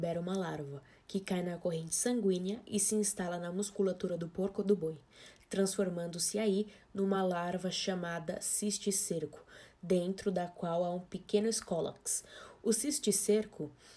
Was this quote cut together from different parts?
no; 0 cuts

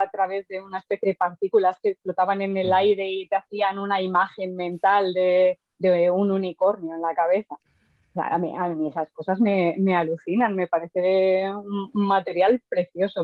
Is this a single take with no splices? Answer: no; 1 cut; at 1.0 s

